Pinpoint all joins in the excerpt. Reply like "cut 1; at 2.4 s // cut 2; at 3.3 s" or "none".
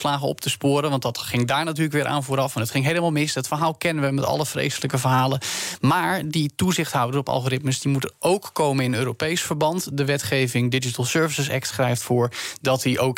none